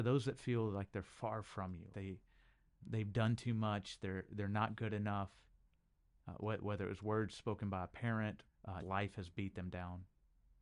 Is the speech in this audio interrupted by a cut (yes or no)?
yes